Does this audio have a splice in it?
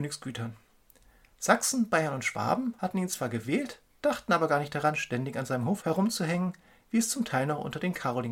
no; 0 cuts

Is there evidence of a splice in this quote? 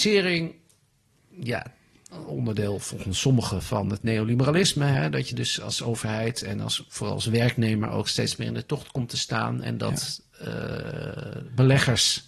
no; 0 cuts

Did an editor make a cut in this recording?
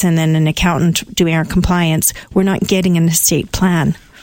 no; 0 cuts

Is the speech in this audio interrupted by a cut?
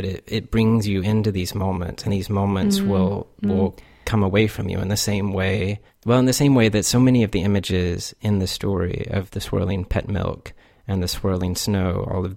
yes; 1 cut; at 2.1 s

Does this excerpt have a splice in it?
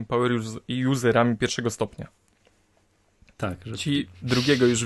no; 0 cuts

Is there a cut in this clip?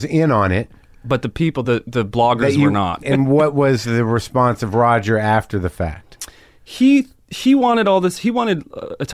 no; 0 cuts

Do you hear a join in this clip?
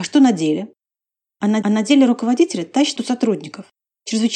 yes; 2 cuts; at 1.6 s, 3.0 s

